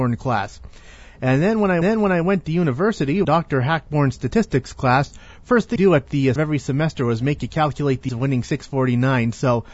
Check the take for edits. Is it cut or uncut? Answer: cut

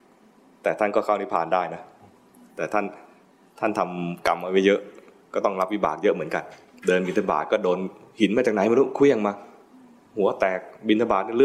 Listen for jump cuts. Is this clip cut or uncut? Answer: uncut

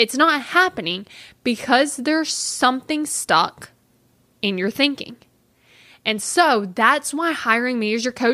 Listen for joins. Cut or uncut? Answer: uncut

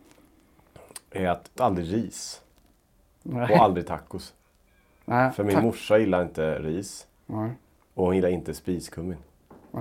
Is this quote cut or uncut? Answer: cut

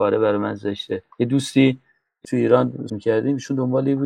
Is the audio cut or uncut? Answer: cut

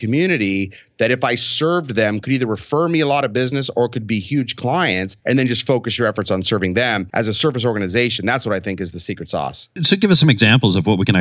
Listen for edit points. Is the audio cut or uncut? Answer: uncut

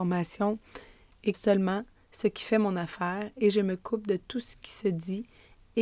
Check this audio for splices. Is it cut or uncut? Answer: cut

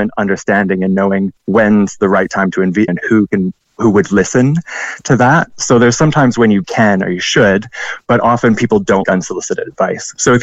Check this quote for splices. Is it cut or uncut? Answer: cut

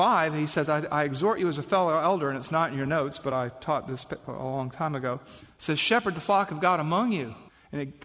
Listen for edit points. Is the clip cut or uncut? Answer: uncut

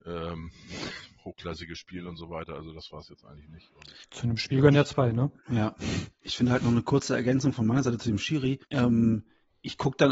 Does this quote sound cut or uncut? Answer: cut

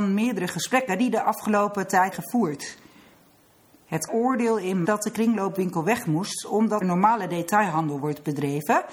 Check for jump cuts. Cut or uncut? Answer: cut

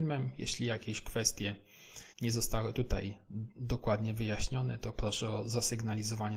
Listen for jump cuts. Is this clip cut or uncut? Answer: cut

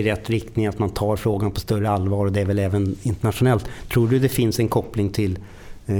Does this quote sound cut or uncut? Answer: uncut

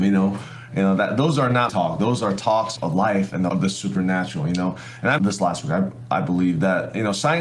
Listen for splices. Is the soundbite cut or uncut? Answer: cut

